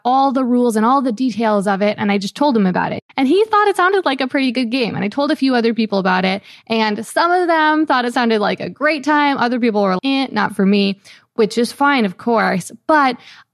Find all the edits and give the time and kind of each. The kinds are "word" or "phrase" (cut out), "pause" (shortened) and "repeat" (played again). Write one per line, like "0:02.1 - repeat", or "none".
0:03.1 - pause
0:10.0 - word

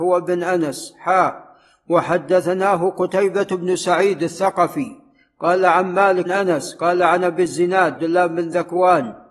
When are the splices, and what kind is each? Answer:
0:06.3 - word
0:08.0 - word

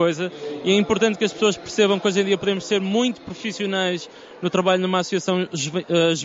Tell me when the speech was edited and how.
none

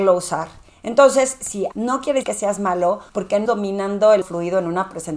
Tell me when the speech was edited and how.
0:01.7 - phrase
0:02.2 - word
0:03.1 - pause
0:03.5 - word
0:04.2 - phrase

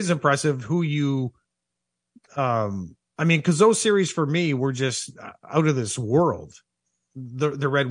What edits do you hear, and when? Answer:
none

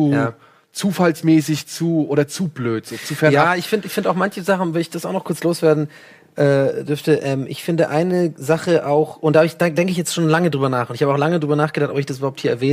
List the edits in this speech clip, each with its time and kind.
none

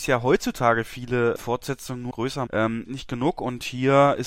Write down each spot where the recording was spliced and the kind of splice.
0:01.4 - word
0:02.1 - word
0:02.5 - word
0:02.8 - phrase

